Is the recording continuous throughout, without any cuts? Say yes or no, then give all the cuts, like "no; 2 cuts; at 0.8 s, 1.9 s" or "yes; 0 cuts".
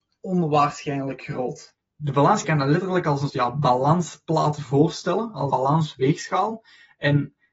no; 4 cuts; at 1.8 s, 2.4 s, 3.3 s, 5.5 s